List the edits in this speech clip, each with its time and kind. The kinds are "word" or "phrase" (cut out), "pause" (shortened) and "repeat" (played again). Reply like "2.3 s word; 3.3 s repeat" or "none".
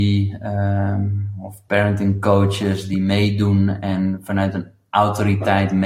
none